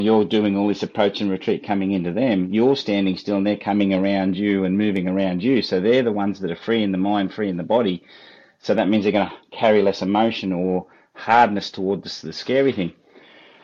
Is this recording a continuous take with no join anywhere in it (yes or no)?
yes